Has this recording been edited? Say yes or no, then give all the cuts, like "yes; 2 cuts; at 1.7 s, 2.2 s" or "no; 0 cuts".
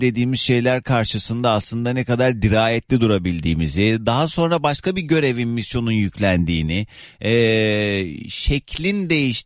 no; 0 cuts